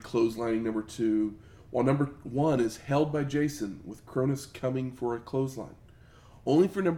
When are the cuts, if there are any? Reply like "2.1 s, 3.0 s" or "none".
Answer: none